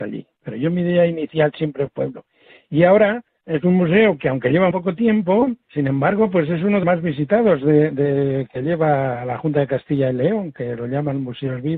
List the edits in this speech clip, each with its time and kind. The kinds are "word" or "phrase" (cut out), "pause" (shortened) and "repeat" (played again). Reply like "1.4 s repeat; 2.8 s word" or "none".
1.9 s phrase; 3.3 s pause; 4.7 s word; 5.6 s pause; 6.8 s word